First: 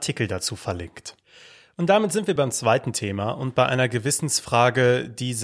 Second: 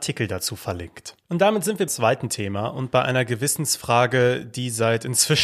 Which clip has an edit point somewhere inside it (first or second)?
second